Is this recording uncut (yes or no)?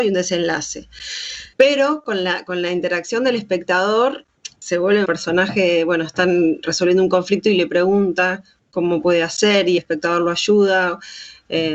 no